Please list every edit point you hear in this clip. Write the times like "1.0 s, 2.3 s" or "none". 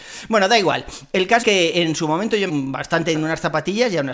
1.4 s, 2.5 s, 3.1 s